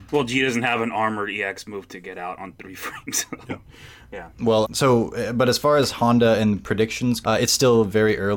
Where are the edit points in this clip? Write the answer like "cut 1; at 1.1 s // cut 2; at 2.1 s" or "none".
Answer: cut 1; at 4.6 s // cut 2; at 7.2 s